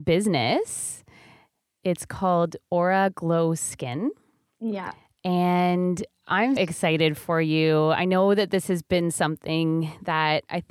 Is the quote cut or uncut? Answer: cut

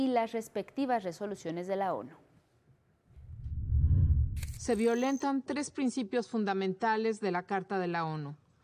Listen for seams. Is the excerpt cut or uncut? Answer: uncut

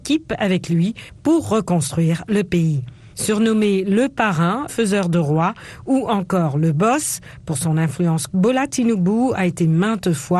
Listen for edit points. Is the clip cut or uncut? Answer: cut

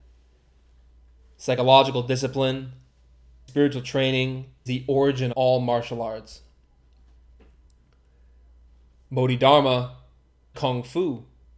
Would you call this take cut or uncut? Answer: cut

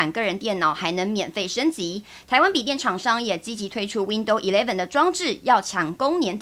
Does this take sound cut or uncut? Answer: uncut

